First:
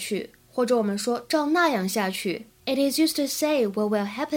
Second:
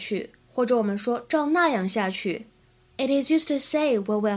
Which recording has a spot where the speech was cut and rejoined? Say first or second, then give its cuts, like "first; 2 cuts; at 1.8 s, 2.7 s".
first; 1 cut; at 2.5 s